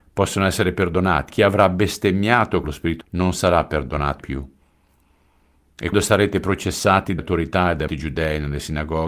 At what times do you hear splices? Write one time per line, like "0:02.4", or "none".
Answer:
0:01.3
0:02.6
0:03.0
0:04.2
0:05.9
0:07.2
0:07.9